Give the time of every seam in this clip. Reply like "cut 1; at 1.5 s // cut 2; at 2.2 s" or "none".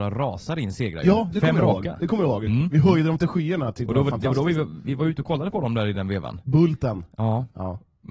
none